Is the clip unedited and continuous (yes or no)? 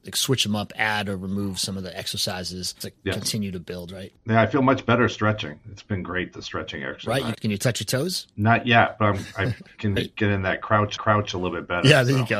no